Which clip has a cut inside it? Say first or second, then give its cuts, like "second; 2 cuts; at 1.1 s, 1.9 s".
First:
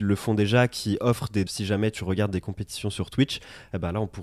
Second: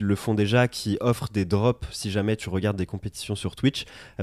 first; 1 cut; at 1.5 s